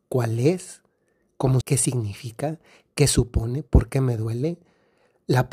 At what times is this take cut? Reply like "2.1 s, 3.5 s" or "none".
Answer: 1.6 s